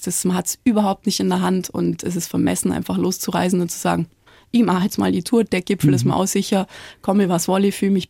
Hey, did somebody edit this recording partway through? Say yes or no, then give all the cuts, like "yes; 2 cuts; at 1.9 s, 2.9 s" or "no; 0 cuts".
no; 0 cuts